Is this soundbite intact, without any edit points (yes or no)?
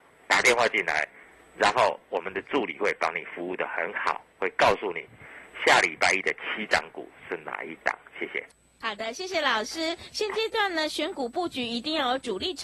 yes